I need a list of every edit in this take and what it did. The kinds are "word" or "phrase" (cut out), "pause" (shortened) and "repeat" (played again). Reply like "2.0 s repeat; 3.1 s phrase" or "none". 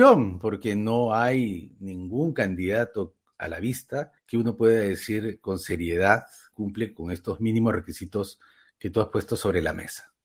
4.2 s pause; 6.5 s word